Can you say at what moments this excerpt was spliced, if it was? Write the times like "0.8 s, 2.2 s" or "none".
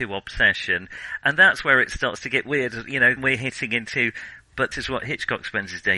3.2 s, 4.7 s